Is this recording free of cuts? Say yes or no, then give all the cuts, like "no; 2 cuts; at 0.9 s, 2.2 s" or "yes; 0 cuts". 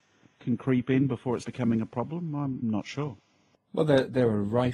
no; 2 cuts; at 1.4 s, 2.6 s